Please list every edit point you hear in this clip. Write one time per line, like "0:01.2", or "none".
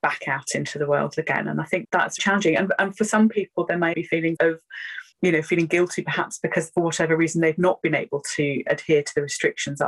0:01.8
0:02.2
0:03.9
0:04.4
0:05.1